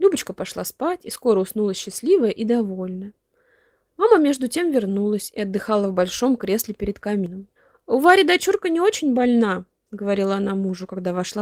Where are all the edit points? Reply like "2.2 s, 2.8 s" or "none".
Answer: 7.6 s